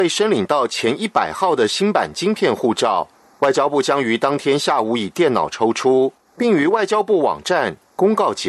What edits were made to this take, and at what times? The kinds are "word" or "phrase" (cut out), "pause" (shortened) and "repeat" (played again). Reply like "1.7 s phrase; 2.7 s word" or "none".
none